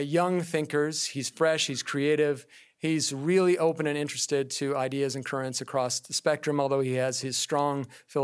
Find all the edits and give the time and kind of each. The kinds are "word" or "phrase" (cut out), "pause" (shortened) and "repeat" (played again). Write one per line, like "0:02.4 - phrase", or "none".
none